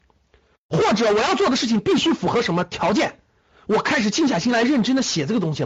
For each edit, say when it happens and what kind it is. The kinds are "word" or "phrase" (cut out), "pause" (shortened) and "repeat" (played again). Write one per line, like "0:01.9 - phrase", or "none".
none